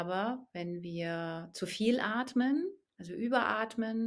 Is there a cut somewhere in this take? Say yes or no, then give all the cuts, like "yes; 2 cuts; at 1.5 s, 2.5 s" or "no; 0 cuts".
yes; 1 cut; at 2.9 s